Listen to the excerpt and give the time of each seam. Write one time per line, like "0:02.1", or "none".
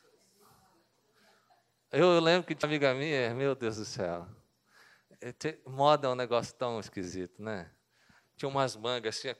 0:02.6

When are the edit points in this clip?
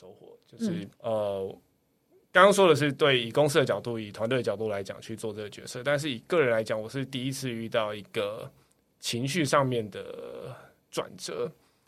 0:00.9

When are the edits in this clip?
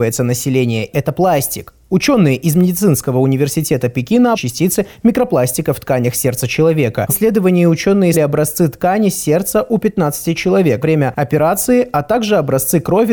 0:00.9
0:04.3
0:07.1
0:08.1
0:10.8

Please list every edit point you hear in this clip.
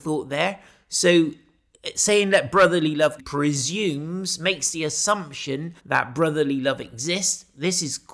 0:03.2
0:05.8

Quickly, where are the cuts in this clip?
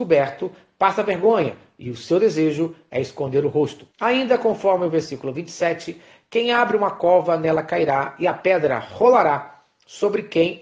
0:03.9

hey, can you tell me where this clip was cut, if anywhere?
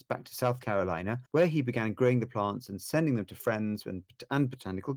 0:01.3

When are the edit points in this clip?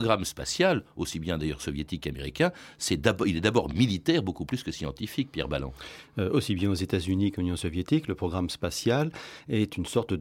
none

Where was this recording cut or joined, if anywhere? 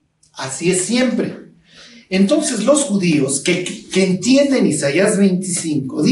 none

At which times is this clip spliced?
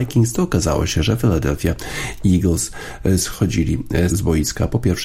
0:04.1

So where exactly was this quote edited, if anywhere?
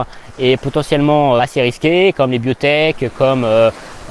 0:01.4

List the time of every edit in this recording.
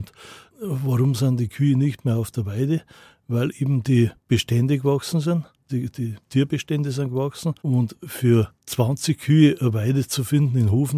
0:04.2
0:05.7
0:06.2
0:07.6
0:08.6

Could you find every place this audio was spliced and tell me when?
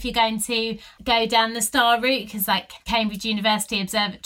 0:02.8

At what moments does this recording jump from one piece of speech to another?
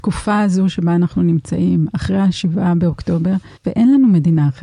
0:03.6

